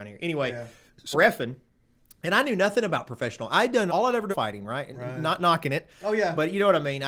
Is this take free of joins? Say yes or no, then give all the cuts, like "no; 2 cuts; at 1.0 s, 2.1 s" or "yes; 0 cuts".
no; 3 cuts; at 1.1 s, 3.9 s, 4.3 s